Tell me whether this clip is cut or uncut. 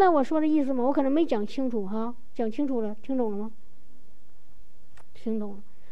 uncut